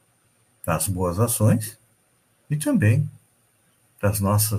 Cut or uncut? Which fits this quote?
cut